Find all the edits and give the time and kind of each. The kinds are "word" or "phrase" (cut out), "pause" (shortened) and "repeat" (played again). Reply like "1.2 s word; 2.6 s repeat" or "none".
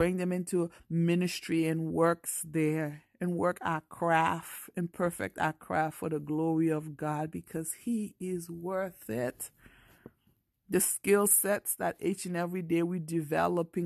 none